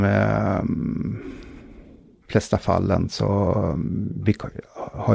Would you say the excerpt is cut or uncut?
uncut